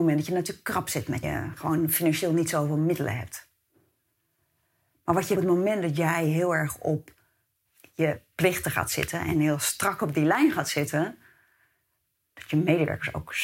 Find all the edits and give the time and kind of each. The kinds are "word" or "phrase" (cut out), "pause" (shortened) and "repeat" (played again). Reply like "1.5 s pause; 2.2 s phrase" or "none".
1.2 s phrase; 5.3 s phrase